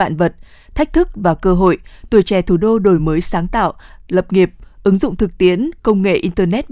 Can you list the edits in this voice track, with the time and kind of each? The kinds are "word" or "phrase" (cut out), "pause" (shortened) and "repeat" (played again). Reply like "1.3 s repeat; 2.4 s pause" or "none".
none